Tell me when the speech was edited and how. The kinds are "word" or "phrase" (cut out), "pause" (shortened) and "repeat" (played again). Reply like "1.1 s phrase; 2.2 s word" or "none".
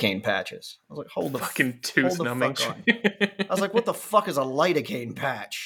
none